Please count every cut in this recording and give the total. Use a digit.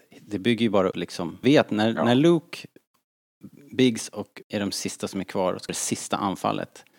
4